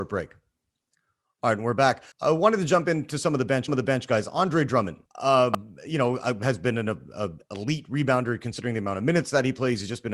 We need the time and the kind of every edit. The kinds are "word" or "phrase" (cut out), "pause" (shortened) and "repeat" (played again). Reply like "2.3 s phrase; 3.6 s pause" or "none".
2.1 s pause; 3.7 s repeat; 5.1 s pause

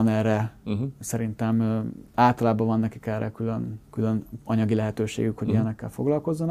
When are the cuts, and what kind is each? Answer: 2.1 s pause; 3.8 s pause

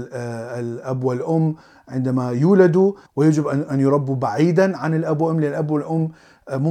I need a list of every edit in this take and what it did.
none

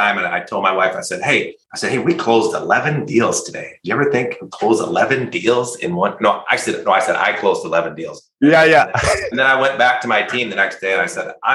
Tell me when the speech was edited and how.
1.6 s pause

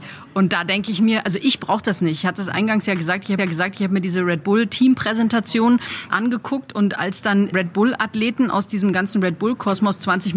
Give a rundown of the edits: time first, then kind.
3.4 s repeat; 6.1 s word; 7.5 s word

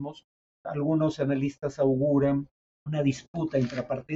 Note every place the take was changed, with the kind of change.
2.6 s pause

